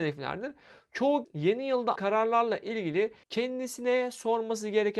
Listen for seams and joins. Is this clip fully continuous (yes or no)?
no